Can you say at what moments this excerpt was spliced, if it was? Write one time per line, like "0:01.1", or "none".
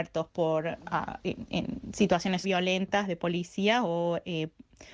0:01.2
0:02.4